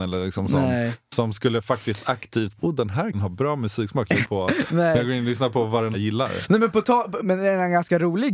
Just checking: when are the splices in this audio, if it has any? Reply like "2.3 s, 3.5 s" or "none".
2.6 s, 3.1 s, 4.2 s, 5.9 s, 7.2 s